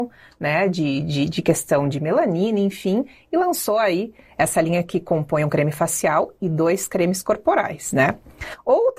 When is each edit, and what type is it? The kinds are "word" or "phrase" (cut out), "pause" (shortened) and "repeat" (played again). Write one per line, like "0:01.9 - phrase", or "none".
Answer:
none